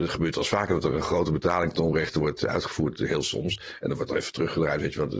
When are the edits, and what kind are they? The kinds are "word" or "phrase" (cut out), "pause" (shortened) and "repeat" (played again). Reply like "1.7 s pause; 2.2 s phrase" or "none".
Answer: none